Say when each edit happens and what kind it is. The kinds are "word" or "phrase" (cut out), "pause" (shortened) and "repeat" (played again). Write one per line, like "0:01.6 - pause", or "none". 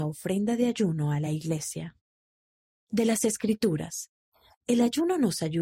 none